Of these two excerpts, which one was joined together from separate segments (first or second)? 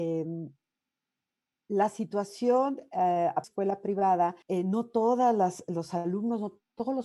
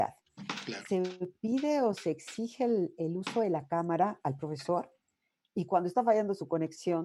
first